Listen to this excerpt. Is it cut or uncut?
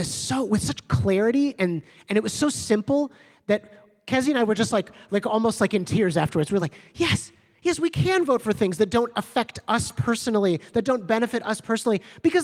uncut